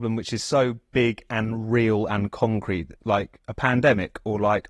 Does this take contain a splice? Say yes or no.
no